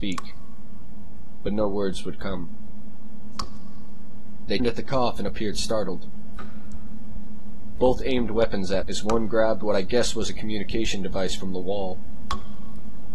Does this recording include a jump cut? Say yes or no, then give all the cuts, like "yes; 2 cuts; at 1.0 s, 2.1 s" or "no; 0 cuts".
yes; 2 cuts; at 4.6 s, 8.8 s